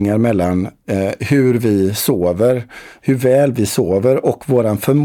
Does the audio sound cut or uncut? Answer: uncut